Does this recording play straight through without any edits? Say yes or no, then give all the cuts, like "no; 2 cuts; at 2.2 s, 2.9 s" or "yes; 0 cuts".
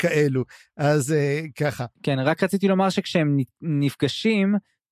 no; 1 cut; at 1.9 s